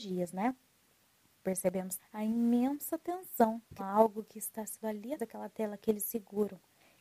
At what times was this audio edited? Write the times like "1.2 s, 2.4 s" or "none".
2.0 s, 3.8 s, 4.8 s, 5.2 s